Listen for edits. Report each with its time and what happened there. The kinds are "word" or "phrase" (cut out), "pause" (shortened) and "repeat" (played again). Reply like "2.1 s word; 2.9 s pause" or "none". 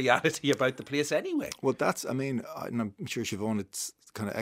none